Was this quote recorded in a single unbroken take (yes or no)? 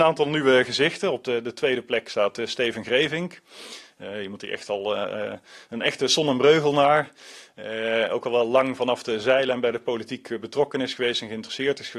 yes